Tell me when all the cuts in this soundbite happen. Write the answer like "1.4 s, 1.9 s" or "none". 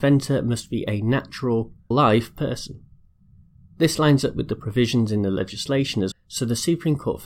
1.9 s, 6.1 s